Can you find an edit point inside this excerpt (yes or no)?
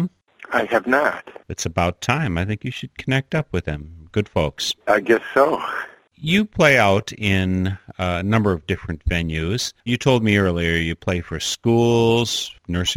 yes